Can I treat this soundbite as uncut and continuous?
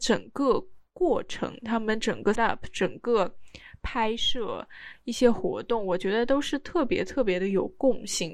no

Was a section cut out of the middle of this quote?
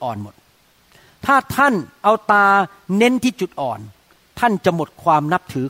no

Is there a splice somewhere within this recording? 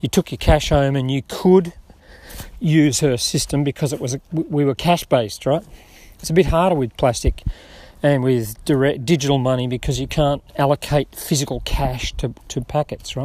no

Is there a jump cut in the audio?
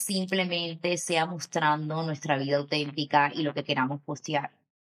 no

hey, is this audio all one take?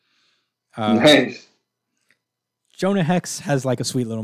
yes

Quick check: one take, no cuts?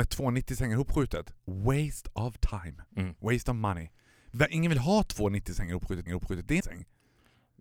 no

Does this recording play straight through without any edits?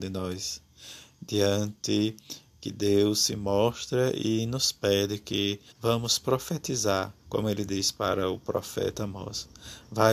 no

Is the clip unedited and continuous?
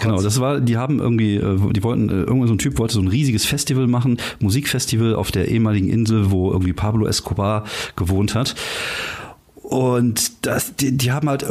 yes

